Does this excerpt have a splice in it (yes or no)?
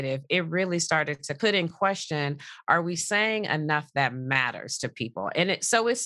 no